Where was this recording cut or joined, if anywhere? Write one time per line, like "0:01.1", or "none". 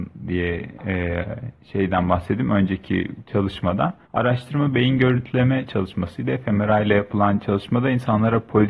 0:04.0